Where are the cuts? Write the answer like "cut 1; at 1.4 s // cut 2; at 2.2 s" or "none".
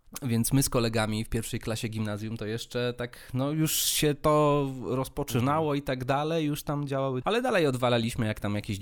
cut 1; at 7.2 s

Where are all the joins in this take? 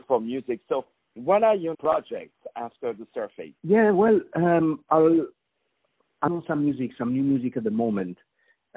cut 1; at 1.7 s // cut 2; at 3.6 s // cut 3; at 6.3 s

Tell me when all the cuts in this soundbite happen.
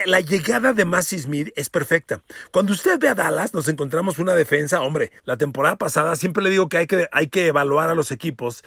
cut 1; at 5.2 s

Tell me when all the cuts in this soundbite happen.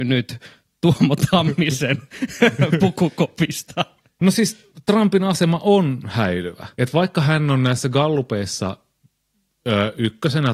cut 1; at 6.7 s

